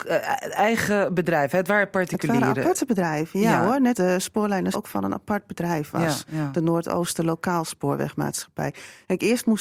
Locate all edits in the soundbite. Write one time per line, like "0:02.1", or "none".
0:03.9
0:04.7

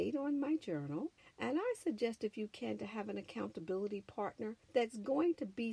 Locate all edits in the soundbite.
0:01.2
0:04.6

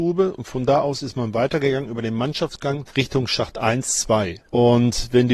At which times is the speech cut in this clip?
0:02.9
0:04.4

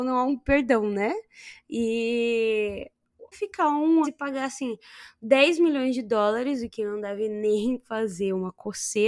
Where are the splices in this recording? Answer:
0:03.3
0:04.0

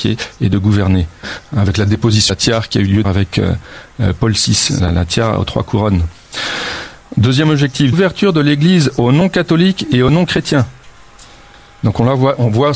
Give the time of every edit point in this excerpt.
0:02.3
0:03.0
0:04.8
0:07.9

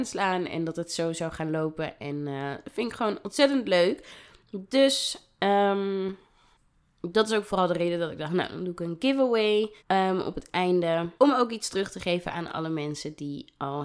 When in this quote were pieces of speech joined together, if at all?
0:09.8
0:11.2

